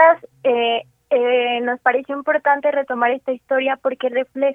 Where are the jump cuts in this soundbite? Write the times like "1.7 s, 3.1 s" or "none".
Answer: none